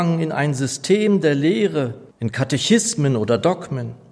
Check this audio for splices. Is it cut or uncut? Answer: cut